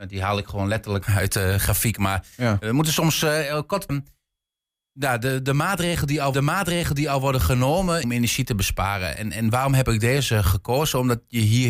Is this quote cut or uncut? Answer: cut